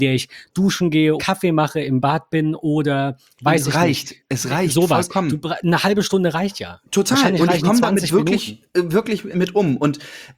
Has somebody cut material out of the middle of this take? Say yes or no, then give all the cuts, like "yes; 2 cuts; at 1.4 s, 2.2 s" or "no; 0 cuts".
yes; 2 cuts; at 1.2 s, 9.3 s